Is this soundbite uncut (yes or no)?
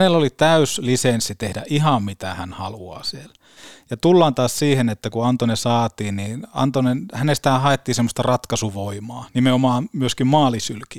yes